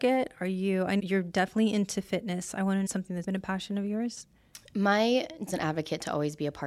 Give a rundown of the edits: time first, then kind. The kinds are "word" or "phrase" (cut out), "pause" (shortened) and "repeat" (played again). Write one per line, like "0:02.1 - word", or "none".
0:01.0 - word
0:02.9 - phrase
0:03.2 - word
0:05.5 - phrase

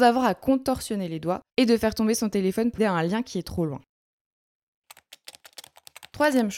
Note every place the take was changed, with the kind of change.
0:01.5 - pause
0:02.8 - word

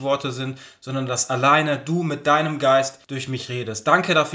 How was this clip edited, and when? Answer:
0:03.0 - pause

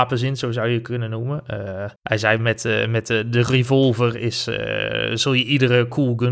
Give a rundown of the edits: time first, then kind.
0:02.0 - pause

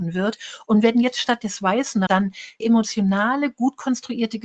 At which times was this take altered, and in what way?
0:02.1 - word
0:02.6 - word

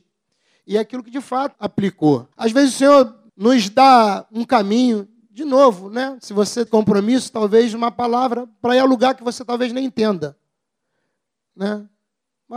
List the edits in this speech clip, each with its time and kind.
0:01.5 - word
0:02.3 - pause
0:03.3 - pause
0:06.7 - phrase

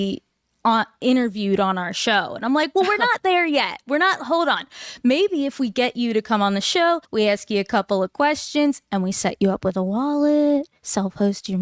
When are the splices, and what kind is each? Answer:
0:07.0 - pause

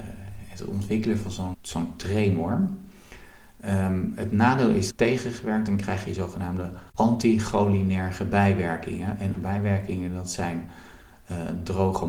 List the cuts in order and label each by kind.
0:01.5 - word
0:04.9 - phrase
0:06.9 - pause
0:09.3 - word

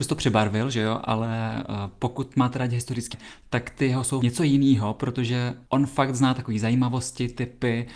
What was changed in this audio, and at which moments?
0:03.1 - word
0:05.7 - pause

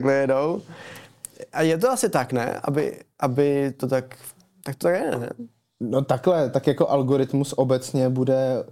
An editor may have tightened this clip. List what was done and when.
none

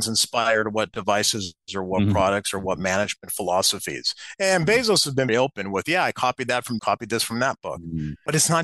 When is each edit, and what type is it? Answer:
0:05.3 - word
0:06.8 - phrase

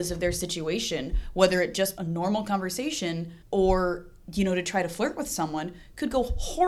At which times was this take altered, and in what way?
0:02.0 - phrase
0:03.4 - pause

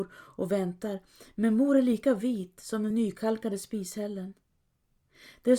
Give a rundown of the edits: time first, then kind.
none

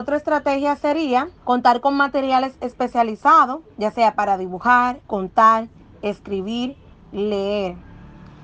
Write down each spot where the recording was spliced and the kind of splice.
0:01.4 - pause
0:03.7 - pause
0:05.0 - pause

